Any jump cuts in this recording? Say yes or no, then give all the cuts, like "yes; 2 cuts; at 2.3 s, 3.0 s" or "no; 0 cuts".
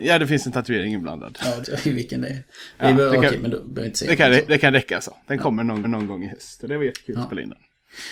yes; 2 cuts; at 1.6 s, 5.8 s